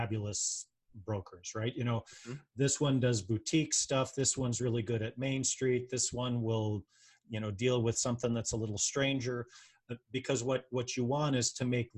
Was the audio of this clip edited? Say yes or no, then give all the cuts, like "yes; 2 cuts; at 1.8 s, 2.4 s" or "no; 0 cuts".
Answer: no; 0 cuts